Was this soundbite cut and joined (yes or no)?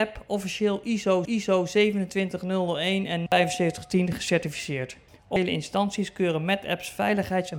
yes